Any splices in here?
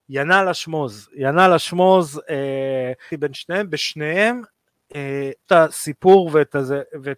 yes; 2 cuts; at 3.1 s, 5.5 s

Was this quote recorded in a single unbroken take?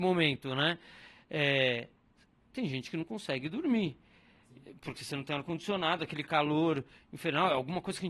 yes; 0 cuts

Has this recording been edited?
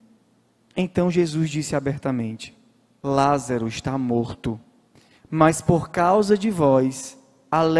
no; 0 cuts

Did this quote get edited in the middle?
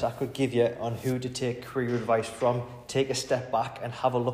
no; 0 cuts

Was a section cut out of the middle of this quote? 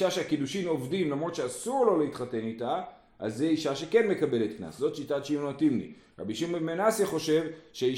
no; 0 cuts

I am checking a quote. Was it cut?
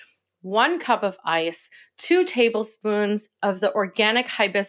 no; 0 cuts

